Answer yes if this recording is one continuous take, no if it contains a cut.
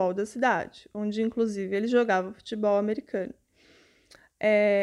yes